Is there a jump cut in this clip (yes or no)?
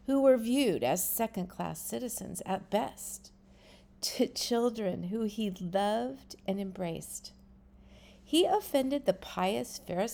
no